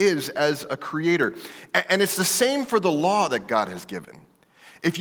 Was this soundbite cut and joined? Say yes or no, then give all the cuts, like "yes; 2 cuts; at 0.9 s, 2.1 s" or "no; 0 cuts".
no; 0 cuts